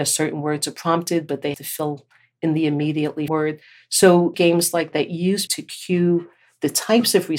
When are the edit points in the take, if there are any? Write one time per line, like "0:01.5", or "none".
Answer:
0:01.5
0:03.3
0:04.3
0:04.9
0:05.5